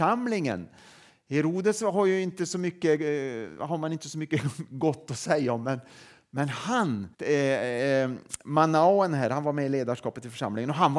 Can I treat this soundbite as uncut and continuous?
no; 1 cut; at 7.1 s

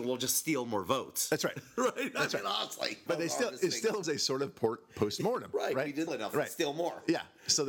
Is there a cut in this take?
yes; 3 cuts; at 3.1 s, 4.0 s, 6.1 s

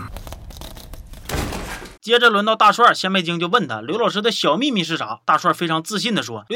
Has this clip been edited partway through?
yes; 1 cut; at 2.0 s

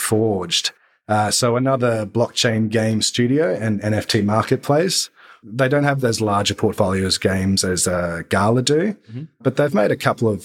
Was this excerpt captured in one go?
yes; 0 cuts

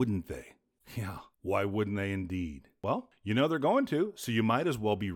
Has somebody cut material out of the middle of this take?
no; 0 cuts

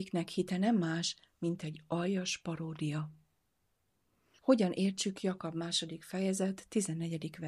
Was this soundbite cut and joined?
no; 0 cuts

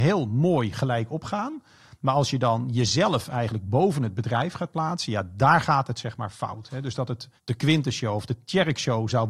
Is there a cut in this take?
yes; 1 cut; at 7.4 s

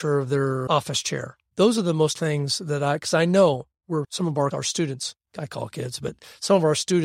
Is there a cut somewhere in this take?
yes; 4 cuts; at 1.5 s, 2.1 s, 4.5 s, 5.2 s

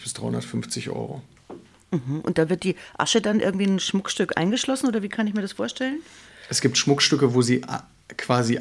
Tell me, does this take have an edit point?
no; 0 cuts

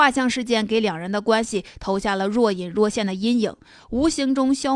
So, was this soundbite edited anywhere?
no; 0 cuts

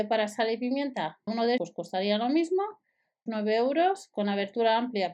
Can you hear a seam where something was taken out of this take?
yes; 3 cuts; at 1.3 s, 1.6 s, 3.3 s

